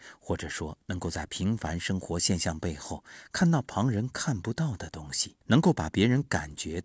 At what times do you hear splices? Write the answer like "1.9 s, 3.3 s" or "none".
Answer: 5.4 s